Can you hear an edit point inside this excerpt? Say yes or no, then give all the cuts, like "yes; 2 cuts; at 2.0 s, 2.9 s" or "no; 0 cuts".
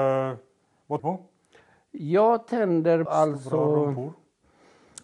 yes; 2 cuts; at 1.0 s, 3.1 s